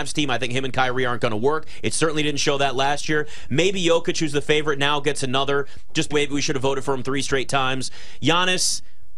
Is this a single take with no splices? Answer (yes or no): no